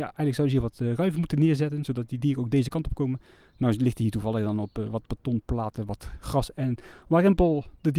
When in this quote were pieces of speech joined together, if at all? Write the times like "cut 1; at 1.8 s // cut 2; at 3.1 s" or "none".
none